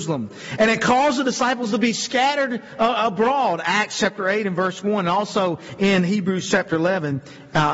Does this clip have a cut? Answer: no; 0 cuts

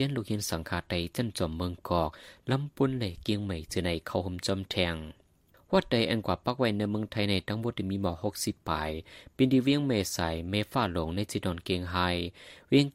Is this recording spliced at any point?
no; 0 cuts

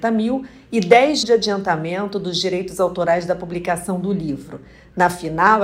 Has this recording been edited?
yes; 1 cut; at 1.2 s

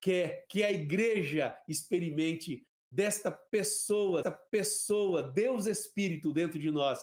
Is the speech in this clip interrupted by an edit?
yes; 1 cut; at 4.2 s

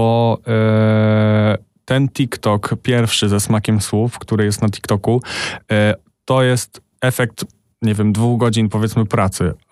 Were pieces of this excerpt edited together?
no; 0 cuts

